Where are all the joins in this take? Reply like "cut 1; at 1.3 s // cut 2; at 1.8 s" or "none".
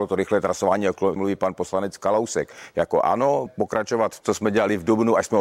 cut 1; at 1.2 s // cut 2; at 3.5 s // cut 3; at 4.2 s